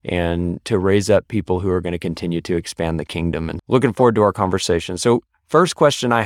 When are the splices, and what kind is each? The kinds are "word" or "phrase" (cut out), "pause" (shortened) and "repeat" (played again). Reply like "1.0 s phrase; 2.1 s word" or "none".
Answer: 3.6 s word